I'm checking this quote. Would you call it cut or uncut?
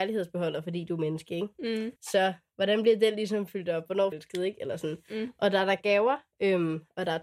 cut